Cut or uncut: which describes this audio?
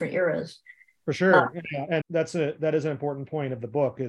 cut